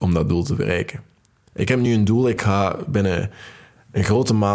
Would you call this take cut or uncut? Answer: uncut